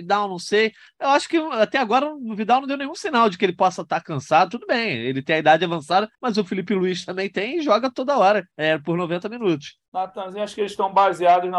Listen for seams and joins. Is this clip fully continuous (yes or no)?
no